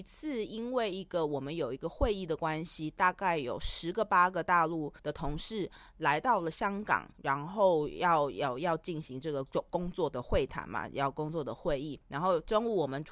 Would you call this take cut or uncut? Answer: cut